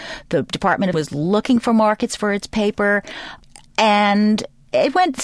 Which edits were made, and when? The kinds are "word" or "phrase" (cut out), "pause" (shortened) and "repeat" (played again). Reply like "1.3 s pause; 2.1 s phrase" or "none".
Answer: 0.9 s word

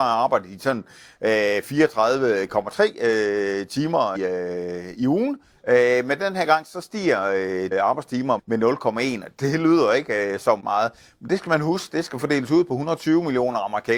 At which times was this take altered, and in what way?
4.1 s word; 4.9 s word; 7.7 s word; 8.4 s word; 10.6 s word

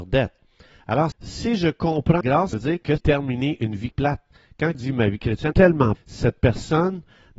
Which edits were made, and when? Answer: 1.1 s word; 2.2 s word; 2.5 s word; 3.0 s word; 3.9 s word; 4.7 s word; 5.5 s word; 5.9 s word

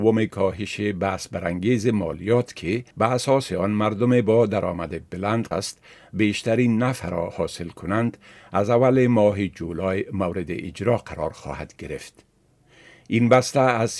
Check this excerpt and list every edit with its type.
2.9 s pause; 5.5 s word

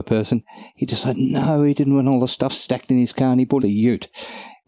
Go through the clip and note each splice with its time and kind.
3.6 s word

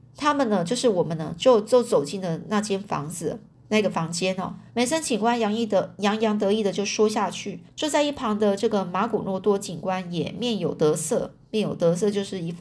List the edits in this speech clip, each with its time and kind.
3.5 s pause; 4.7 s pause; 7.7 s pause

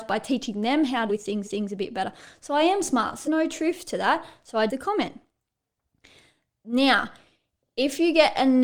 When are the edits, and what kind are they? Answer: 1.1 s word; 1.4 s repeat; 3.2 s word; 4.7 s word

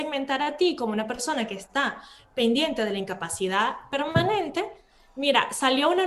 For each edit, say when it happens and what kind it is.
none

